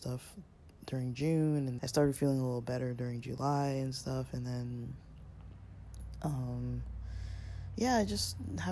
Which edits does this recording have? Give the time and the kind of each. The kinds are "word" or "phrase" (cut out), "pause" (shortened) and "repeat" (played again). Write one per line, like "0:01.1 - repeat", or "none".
0:01.8 - word